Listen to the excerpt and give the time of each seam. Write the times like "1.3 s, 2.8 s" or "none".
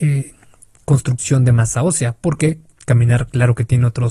none

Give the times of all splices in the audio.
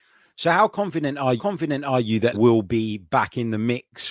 1.4 s, 2.3 s

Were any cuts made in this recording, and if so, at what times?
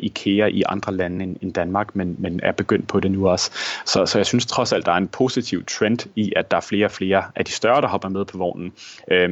none

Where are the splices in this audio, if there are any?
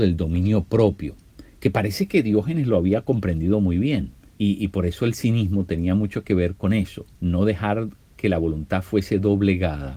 1.5 s, 4.3 s, 7.1 s

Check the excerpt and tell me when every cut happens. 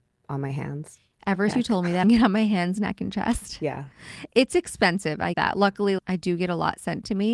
1.5 s, 2.0 s, 5.3 s, 6.0 s

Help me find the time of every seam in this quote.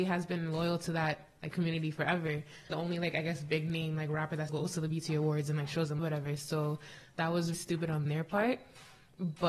2.7 s, 4.5 s, 6.0 s, 7.5 s

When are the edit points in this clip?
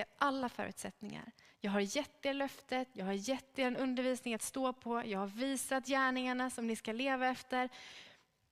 none

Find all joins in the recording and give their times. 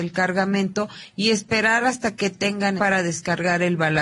2.8 s

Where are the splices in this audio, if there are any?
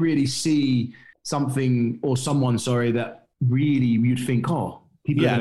1.1 s, 3.3 s

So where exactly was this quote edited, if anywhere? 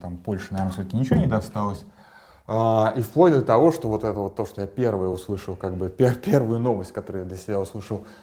none

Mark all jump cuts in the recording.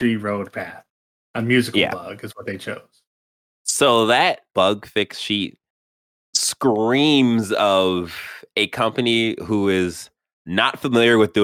none

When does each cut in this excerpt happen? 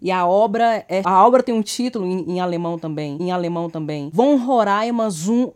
1.0 s, 3.2 s

